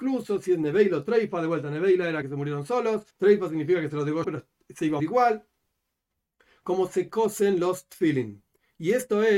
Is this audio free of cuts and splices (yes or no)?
no